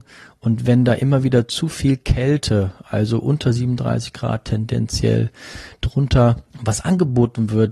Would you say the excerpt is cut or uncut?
cut